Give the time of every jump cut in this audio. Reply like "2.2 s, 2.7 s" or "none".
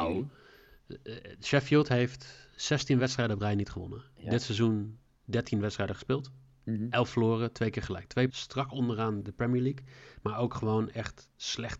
8.3 s, 9.2 s